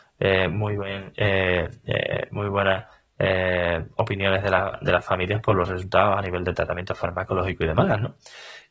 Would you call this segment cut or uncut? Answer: uncut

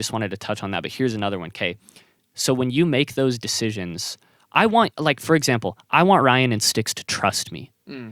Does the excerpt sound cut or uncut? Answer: uncut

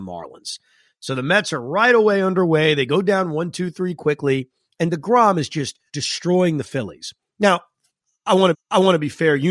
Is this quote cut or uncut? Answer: cut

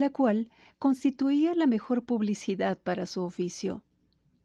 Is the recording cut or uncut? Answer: uncut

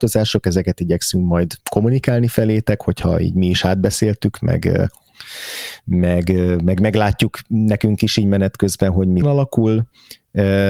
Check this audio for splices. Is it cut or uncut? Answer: cut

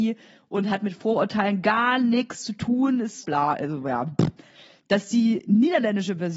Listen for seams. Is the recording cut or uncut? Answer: cut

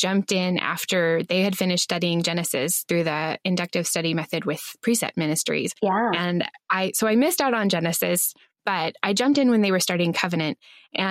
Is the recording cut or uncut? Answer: uncut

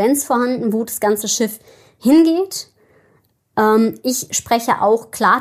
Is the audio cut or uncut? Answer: uncut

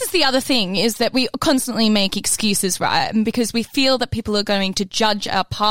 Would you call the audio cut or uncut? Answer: uncut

